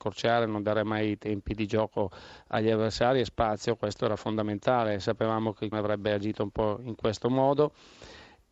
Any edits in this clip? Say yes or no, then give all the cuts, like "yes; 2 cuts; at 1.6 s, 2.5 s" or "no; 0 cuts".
yes; 1 cut; at 5.7 s